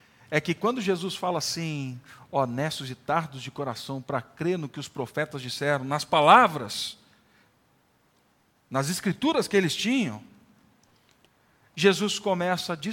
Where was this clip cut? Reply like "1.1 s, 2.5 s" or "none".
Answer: none